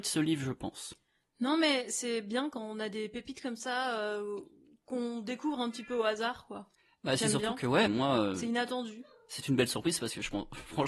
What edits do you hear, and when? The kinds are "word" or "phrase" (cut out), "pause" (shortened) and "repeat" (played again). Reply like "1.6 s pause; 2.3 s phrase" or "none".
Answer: 7.9 s word

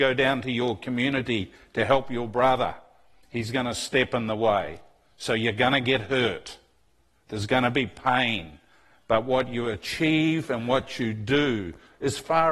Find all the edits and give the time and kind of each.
none

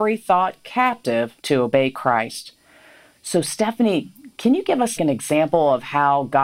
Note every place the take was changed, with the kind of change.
1.4 s pause; 5.0 s word

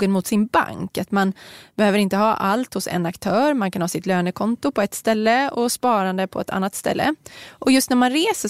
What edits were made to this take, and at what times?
none

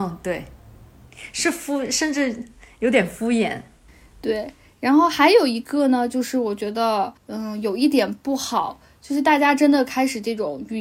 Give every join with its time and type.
7.2 s pause

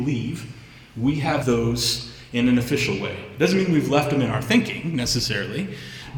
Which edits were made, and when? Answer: 1.4 s word

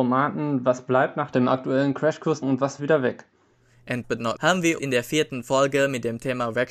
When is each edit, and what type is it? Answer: 2.4 s word; 2.8 s word; 4.0 s word; 4.4 s word; 4.8 s word

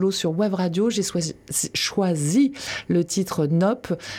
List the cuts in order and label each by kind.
none

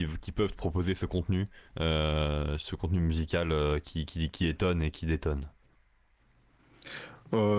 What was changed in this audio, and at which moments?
1.7 s pause

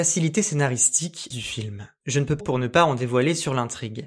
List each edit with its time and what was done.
1.3 s phrase; 2.4 s phrase

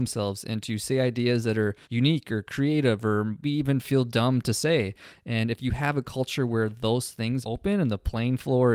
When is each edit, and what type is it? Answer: 1.8 s pause; 3.4 s word; 7.4 s word

